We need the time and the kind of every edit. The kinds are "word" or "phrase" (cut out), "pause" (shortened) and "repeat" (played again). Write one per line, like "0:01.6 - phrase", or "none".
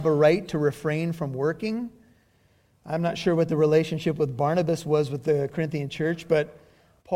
none